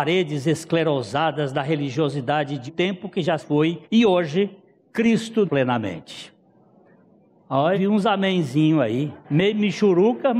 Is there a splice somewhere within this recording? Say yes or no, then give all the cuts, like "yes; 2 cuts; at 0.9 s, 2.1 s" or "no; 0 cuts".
yes; 6 cuts; at 2.7 s, 3.4 s, 3.8 s, 5.4 s, 7.7 s, 9.2 s